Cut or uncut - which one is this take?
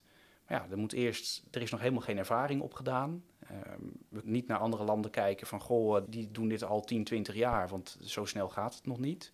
cut